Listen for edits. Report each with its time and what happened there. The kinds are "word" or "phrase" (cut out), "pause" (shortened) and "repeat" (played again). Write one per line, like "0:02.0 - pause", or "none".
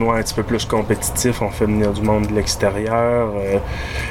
none